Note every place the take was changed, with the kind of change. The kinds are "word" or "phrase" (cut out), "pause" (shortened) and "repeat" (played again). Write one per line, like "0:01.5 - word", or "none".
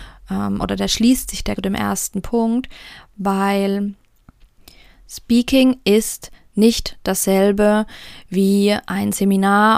0:01.6 - phrase